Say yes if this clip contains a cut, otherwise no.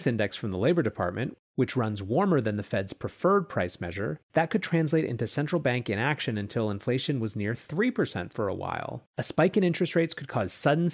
yes